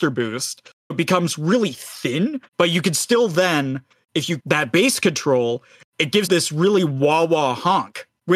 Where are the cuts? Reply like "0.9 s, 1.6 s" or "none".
0.9 s, 2.5 s, 4.4 s, 6.3 s